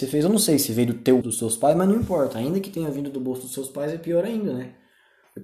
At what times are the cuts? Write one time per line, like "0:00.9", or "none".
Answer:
0:01.2